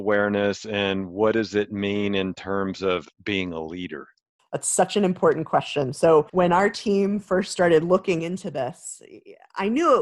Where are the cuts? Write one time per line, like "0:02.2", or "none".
0:03.1
0:04.4
0:06.3